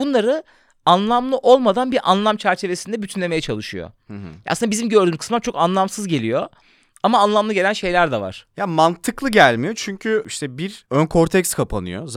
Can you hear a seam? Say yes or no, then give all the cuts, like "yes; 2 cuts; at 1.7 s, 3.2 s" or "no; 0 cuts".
no; 0 cuts